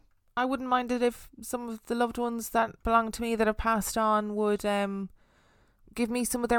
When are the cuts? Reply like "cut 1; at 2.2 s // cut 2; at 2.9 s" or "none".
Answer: cut 1; at 2.8 s